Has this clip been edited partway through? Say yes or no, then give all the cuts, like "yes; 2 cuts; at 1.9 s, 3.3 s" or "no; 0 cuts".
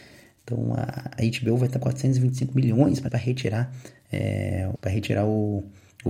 yes; 4 cuts; at 1.2 s, 1.8 s, 3.1 s, 4.8 s